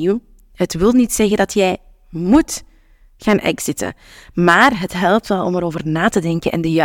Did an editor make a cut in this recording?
no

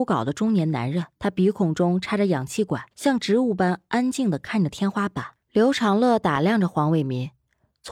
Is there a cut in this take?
yes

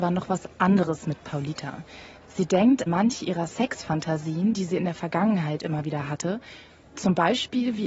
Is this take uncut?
no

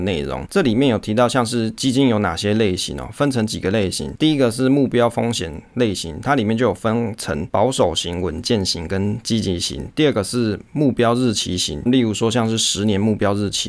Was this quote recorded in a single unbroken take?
no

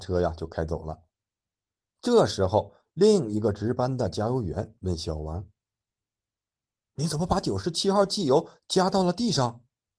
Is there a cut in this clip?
no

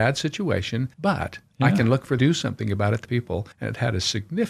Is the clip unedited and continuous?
no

